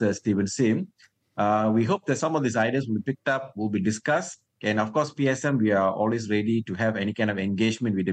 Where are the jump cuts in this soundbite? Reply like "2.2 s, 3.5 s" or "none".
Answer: none